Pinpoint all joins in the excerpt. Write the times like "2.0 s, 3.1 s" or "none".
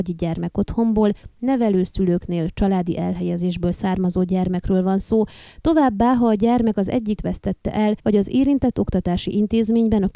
7.2 s, 8.0 s